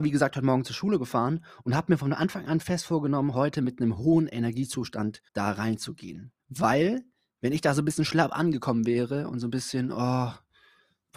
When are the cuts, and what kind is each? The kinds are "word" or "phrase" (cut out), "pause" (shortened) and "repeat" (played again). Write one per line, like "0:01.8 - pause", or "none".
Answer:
0:05.3 - pause
0:06.4 - pause